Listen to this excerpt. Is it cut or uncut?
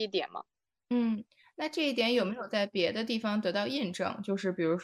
uncut